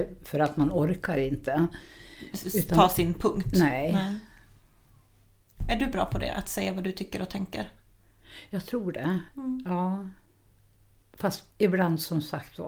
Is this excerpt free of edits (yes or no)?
no